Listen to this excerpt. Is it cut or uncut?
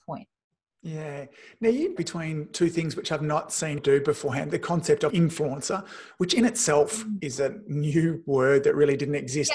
cut